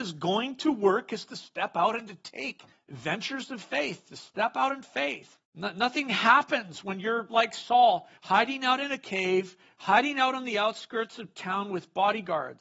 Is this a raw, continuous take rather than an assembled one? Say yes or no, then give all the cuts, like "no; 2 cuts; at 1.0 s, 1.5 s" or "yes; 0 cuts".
no; 3 cuts; at 2.7 s, 5.4 s, 8.2 s